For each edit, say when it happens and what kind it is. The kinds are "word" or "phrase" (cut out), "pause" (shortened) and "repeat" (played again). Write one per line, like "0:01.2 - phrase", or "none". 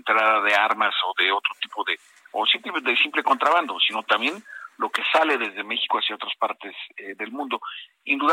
none